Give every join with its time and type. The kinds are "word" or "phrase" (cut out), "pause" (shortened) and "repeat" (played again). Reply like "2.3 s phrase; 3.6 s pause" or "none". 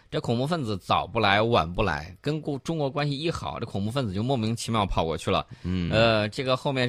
none